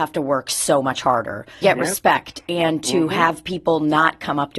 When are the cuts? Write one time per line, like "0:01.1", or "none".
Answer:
0:01.6